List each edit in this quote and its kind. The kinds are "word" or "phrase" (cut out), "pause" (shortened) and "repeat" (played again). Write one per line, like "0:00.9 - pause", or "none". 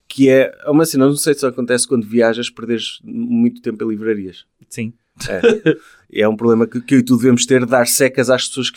none

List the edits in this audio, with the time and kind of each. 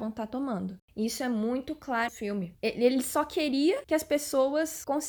0:02.1 - word

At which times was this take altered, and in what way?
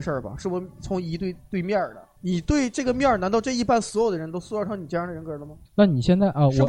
0:02.1 - pause
0:05.6 - pause

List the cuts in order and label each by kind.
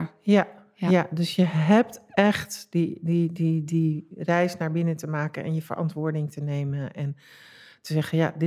none

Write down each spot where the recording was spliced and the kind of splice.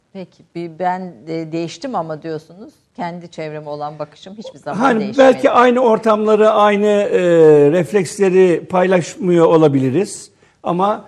none

